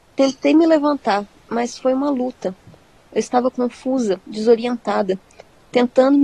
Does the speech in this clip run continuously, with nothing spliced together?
yes; 0 cuts

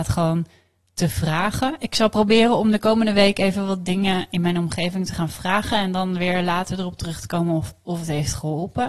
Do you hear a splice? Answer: no; 0 cuts

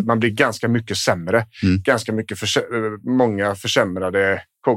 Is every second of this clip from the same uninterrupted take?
yes; 0 cuts

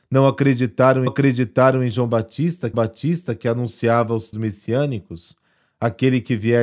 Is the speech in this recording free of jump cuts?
no; 3 cuts; at 1.1 s, 2.7 s, 4.3 s

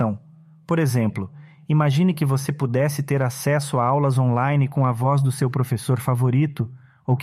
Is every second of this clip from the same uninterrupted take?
yes; 0 cuts

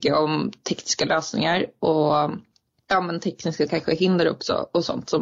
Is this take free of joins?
yes; 0 cuts

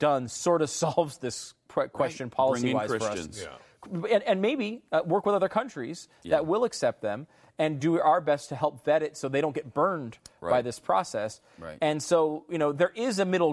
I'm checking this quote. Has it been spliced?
no; 0 cuts

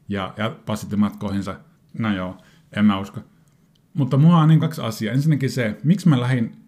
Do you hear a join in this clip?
yes; 1 cut; at 4.6 s

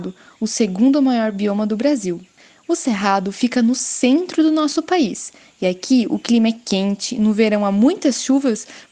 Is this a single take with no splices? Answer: yes; 0 cuts

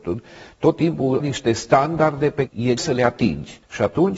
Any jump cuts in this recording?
yes; 3 cuts; at 1.2 s, 2.5 s, 2.8 s

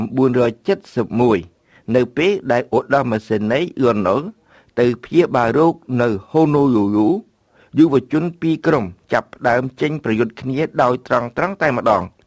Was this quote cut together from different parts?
no; 0 cuts

